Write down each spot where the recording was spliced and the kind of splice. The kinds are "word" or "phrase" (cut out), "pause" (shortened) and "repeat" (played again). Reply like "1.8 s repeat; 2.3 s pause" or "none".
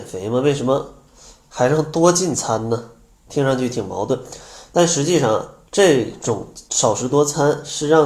5.6 s pause; 6.7 s pause